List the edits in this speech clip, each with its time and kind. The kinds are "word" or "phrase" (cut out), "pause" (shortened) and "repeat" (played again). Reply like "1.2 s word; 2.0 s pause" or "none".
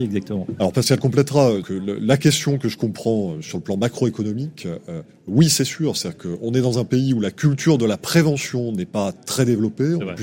1.6 s word